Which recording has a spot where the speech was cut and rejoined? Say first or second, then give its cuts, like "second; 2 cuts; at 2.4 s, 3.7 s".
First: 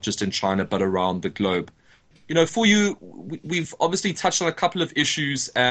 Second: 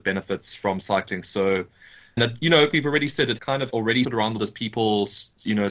second; 6 cuts; at 2.2 s, 2.7 s, 3.4 s, 3.7 s, 4.0 s, 4.4 s